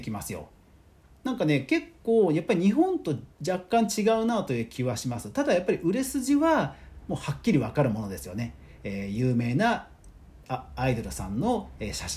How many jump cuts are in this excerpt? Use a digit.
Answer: 1